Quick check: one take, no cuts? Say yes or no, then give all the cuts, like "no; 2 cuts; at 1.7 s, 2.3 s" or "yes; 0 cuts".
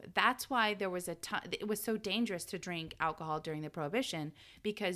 yes; 0 cuts